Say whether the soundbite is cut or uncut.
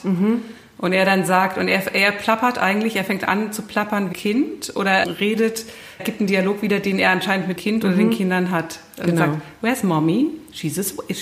cut